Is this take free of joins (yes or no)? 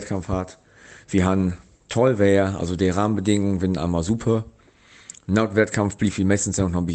yes